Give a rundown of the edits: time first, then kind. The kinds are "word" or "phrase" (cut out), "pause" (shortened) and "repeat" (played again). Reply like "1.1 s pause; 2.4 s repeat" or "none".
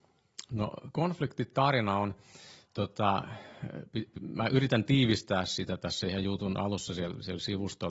none